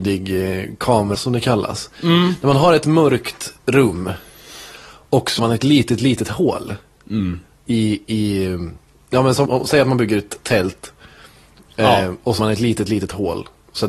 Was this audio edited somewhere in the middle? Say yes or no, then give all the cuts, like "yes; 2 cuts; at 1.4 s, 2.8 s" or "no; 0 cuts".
yes; 4 cuts; at 1.1 s, 5.4 s, 9.5 s, 12.4 s